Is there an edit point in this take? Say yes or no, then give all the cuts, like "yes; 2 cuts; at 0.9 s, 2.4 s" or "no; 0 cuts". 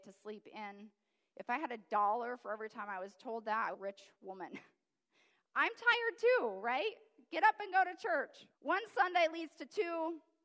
yes; 2 cuts; at 3.7 s, 8.5 s